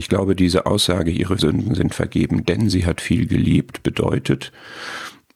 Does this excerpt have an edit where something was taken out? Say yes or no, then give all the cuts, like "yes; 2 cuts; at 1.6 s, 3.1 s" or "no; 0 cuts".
yes; 1 cut; at 1.4 s